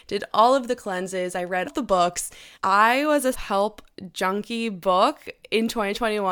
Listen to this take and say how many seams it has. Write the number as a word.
three